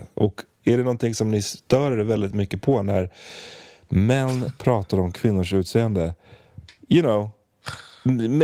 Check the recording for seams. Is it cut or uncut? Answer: uncut